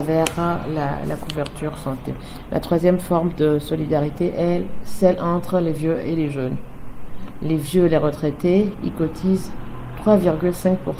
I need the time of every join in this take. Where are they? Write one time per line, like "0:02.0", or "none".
none